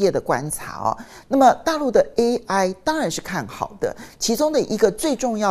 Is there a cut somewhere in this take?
no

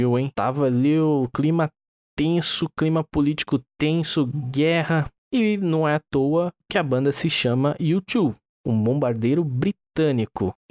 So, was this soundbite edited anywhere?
no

